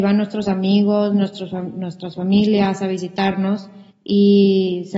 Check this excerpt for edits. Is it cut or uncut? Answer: cut